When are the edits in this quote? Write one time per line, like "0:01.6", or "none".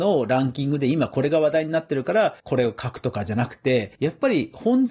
0:02.4
0:04.0